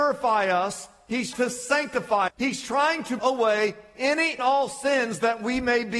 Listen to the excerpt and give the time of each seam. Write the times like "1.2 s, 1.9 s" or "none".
1.3 s, 2.3 s, 3.2 s, 4.4 s